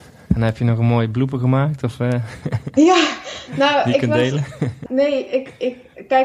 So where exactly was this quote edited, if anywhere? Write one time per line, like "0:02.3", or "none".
0:04.9

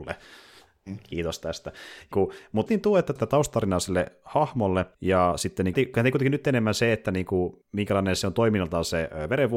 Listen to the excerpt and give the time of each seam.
0:02.1
0:02.7
0:03.2
0:04.9
0:05.7
0:07.6

